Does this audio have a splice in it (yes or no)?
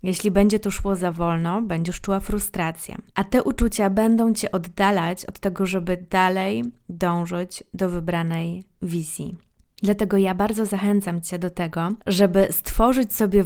yes